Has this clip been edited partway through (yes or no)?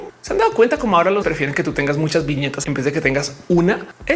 yes